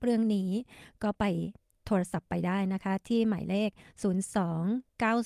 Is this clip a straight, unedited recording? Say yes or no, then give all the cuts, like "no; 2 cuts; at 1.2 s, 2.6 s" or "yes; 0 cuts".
yes; 0 cuts